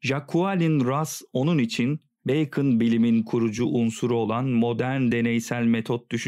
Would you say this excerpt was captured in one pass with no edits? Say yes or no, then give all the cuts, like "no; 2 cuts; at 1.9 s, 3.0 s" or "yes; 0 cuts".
yes; 0 cuts